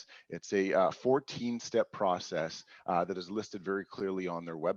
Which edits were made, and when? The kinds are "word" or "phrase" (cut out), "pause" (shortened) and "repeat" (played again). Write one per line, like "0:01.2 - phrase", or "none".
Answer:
none